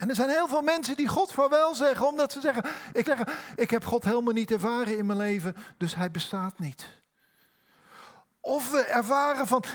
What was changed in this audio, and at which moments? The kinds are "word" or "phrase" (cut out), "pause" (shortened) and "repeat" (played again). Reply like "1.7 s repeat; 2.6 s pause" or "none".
3.0 s repeat